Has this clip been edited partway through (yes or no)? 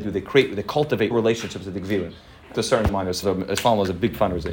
yes